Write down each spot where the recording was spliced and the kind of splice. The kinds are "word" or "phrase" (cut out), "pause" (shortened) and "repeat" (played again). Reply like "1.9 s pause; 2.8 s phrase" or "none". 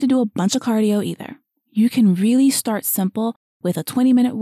none

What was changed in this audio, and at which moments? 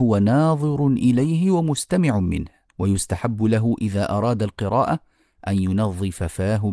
2.7 s pause

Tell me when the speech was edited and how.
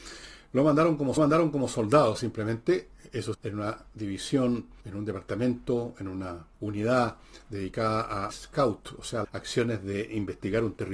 1.2 s repeat; 3.3 s word; 4.8 s pause; 6.5 s pause; 8.3 s word; 9.2 s word

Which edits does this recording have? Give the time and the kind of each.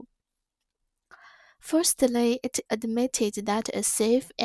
2.7 s word

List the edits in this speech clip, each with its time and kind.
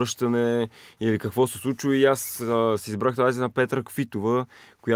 none

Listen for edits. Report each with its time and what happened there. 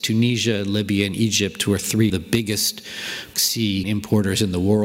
2.1 s word; 3.3 s word; 3.8 s word

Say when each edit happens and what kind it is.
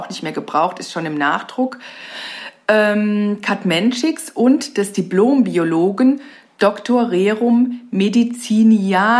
none

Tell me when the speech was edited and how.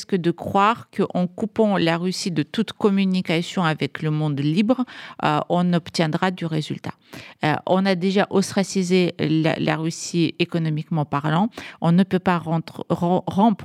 none

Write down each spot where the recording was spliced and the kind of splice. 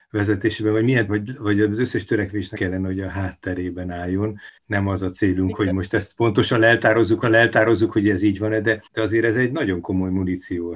1.1 s phrase; 2.5 s word; 4.6 s pause; 7.2 s repeat; 8.9 s pause

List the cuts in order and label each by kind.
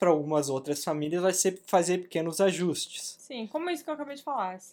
none

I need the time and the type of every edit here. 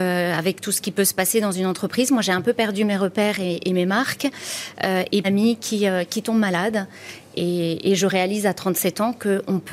5.2 s phrase

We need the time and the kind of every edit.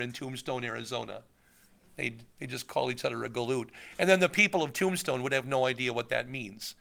none

